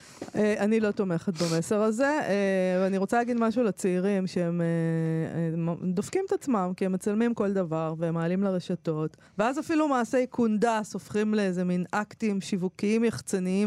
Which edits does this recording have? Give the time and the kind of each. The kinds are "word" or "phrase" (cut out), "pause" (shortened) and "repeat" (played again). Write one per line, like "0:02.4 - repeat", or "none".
0:09.3 - pause